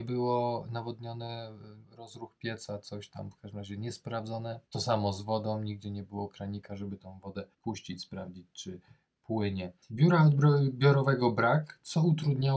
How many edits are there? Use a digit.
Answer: 4